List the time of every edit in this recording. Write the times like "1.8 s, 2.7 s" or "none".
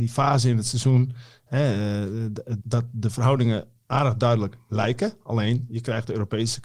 2.6 s